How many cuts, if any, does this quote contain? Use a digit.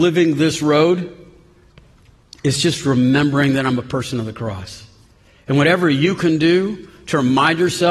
0